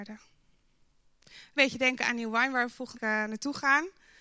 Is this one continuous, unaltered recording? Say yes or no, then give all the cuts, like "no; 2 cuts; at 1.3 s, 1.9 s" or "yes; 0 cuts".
no; 2 cuts; at 1.6 s, 2.9 s